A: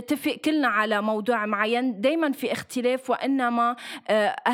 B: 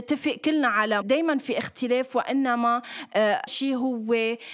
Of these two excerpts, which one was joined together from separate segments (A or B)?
B